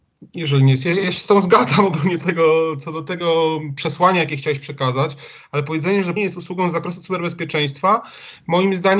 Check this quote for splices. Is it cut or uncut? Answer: cut